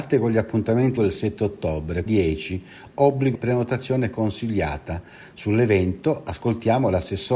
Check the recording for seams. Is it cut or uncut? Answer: cut